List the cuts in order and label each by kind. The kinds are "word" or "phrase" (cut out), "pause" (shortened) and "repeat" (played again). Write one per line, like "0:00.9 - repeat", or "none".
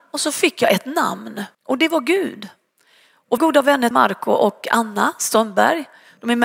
0:01.5 - pause
0:03.4 - phrase
0:03.9 - word